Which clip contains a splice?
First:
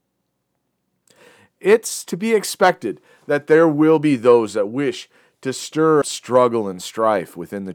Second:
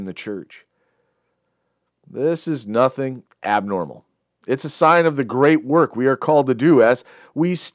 first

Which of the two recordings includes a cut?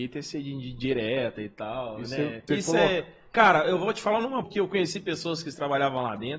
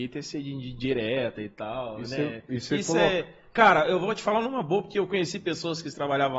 first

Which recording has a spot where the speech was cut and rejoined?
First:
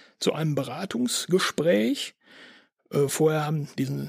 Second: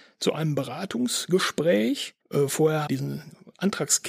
second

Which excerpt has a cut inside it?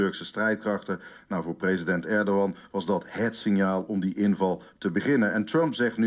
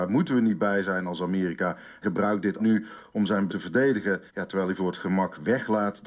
second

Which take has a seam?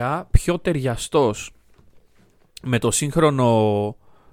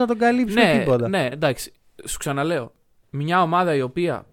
second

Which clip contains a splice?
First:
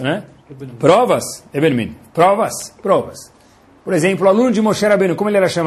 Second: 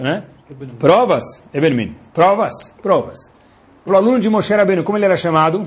second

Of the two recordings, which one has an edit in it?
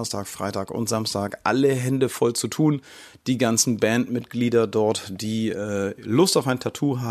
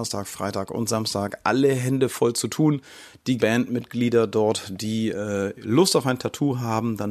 second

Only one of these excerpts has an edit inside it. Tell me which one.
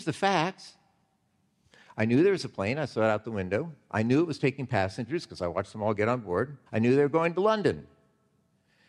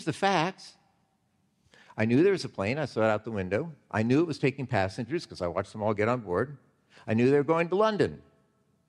first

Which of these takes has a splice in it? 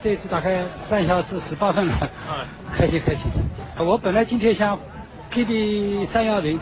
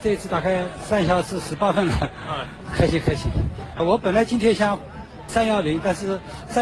second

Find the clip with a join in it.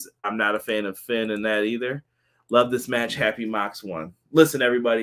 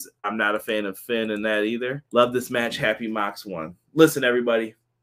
second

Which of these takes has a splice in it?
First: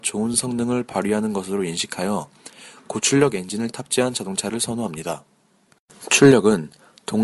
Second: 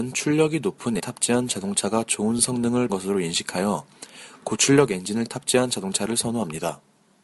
second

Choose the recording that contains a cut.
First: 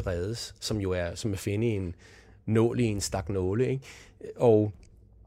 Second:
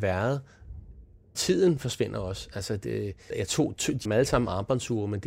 second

